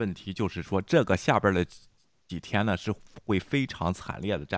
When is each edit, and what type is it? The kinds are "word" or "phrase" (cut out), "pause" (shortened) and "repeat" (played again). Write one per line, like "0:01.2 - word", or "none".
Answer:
none